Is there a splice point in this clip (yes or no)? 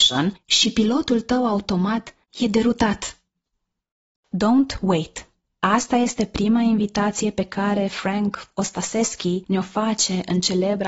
no